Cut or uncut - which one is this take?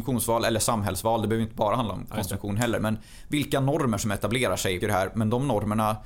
cut